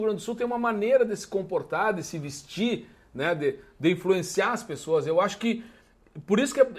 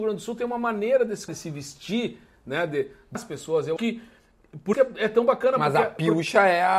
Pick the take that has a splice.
second; 4 cuts; at 1.3 s, 3.2 s, 3.8 s, 4.7 s

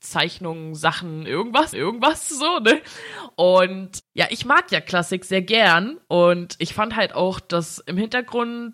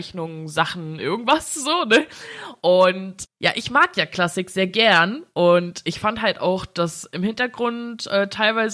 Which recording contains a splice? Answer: first; 1 cut; at 1.7 s

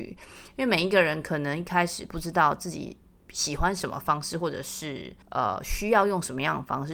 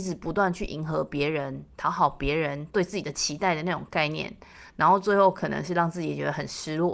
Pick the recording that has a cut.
first; 1 cut; at 5.2 s

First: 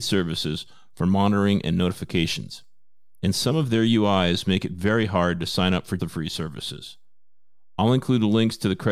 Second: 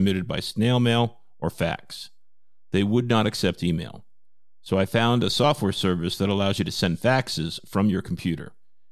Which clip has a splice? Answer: first; 1 cut; at 6.0 s

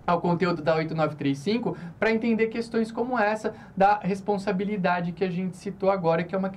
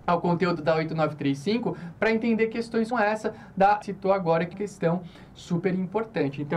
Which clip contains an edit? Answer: second; 3 cuts; at 2.9 s, 3.8 s, 4.5 s

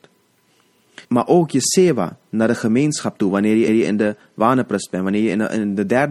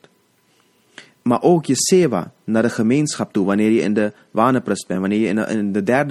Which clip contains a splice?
first; 2 cuts; at 1.0 s, 3.7 s

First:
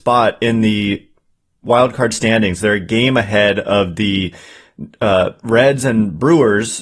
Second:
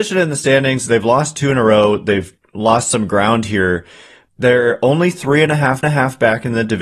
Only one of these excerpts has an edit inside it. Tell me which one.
second; 3 cuts; at 2.4 s, 4.3 s, 5.8 s

